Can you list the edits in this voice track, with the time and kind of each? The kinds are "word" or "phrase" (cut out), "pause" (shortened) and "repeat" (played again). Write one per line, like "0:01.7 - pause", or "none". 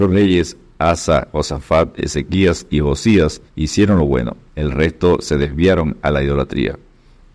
0:03.5 - pause
0:04.5 - pause